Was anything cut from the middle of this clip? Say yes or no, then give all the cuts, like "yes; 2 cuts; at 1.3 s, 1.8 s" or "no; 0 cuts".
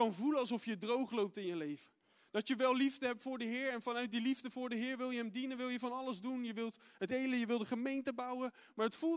yes; 1 cut; at 7.1 s